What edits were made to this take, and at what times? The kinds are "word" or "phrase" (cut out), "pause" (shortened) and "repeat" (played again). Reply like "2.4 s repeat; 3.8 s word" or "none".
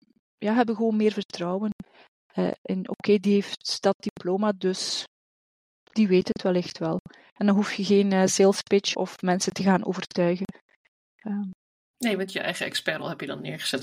8.9 s word